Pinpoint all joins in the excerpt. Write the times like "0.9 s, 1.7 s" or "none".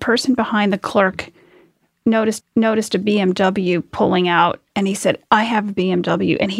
2.4 s, 4.7 s, 5.2 s